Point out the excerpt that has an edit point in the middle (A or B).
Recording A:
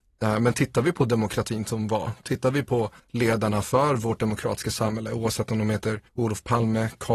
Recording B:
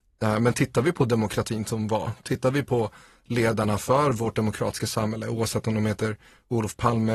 A